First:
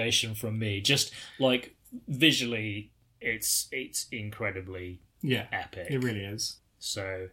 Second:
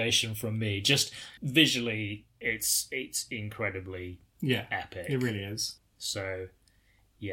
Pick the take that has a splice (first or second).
second